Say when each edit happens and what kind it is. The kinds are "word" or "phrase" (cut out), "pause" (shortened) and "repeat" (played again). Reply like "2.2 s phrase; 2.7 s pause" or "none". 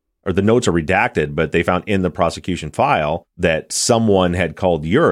3.3 s pause